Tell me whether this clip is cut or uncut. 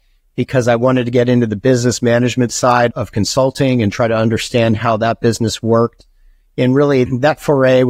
uncut